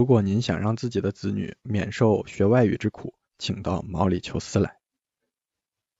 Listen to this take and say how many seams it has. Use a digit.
1